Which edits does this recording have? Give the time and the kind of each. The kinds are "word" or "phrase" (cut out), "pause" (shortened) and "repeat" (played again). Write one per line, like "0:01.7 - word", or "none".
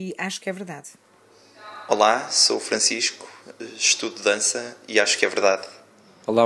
none